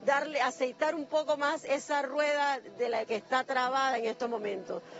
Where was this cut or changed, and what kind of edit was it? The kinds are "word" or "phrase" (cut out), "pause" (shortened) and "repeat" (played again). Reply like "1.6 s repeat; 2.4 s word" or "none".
3.0 s word

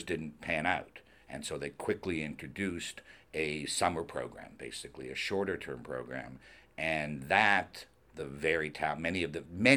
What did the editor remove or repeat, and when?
none

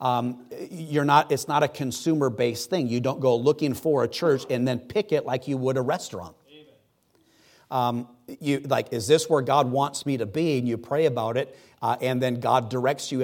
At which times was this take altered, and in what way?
none

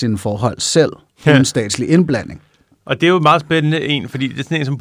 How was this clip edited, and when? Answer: none

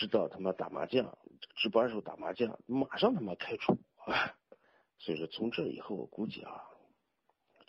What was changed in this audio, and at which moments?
4.6 s pause

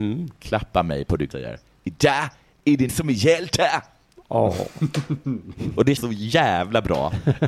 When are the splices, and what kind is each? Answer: 1.3 s word; 2.9 s word; 6.0 s word

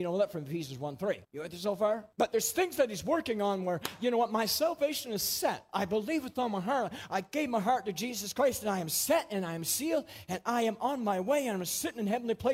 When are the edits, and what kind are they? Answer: 1.2 s pause; 2.1 s pause

